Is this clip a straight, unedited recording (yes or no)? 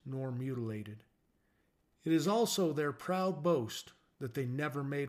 yes